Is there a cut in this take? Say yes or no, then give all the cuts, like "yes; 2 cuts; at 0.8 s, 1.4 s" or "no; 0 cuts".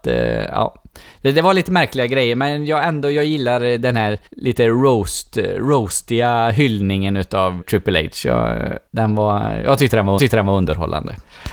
yes; 4 cuts; at 4.3 s, 7.6 s, 8.9 s, 10.2 s